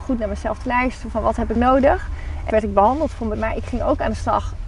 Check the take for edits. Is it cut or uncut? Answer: cut